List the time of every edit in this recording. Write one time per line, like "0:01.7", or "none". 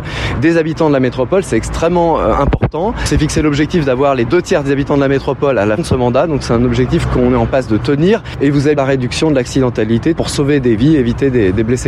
0:05.8
0:08.8
0:10.2